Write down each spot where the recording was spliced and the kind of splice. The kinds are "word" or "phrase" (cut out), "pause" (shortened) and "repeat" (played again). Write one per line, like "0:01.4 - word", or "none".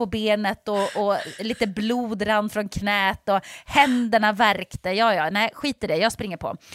none